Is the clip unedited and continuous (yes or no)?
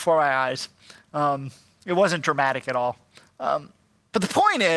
yes